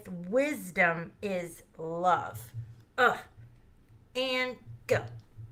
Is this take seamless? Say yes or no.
yes